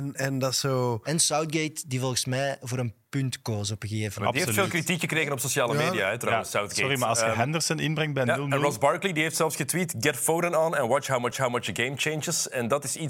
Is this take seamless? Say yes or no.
no